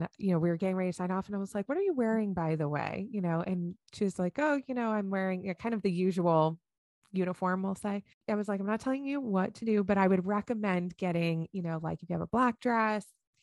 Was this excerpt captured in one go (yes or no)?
no